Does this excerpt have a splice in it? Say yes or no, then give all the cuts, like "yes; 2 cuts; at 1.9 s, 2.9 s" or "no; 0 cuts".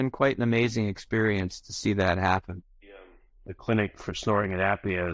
no; 0 cuts